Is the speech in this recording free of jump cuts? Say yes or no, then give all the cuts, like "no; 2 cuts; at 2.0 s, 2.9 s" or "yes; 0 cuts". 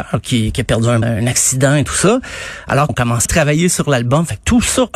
no; 3 cuts; at 1.0 s, 2.9 s, 3.3 s